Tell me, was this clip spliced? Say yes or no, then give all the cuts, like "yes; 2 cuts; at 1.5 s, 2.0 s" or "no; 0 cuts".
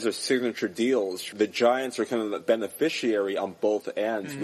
yes; 2 cuts; at 1.3 s, 2.4 s